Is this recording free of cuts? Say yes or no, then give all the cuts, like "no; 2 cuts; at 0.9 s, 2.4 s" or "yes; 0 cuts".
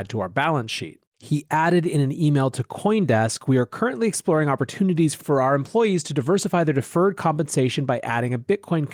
no; 1 cut; at 1.1 s